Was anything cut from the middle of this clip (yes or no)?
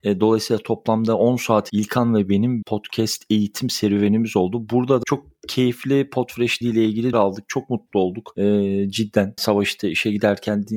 yes